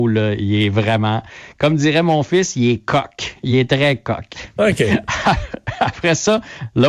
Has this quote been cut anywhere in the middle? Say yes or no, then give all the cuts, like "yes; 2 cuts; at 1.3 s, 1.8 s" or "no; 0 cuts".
no; 0 cuts